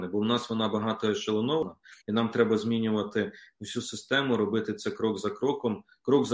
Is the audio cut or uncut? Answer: cut